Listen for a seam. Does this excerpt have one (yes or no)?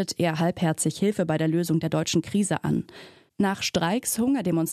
no